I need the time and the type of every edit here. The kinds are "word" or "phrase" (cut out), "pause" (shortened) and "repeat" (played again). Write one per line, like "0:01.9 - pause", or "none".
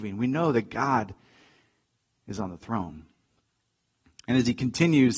none